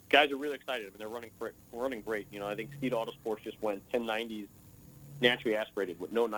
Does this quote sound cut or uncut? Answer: cut